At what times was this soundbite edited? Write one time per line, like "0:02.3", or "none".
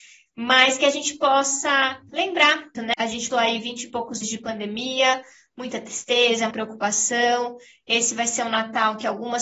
0:02.1
0:02.7
0:03.3
0:04.2
0:06.5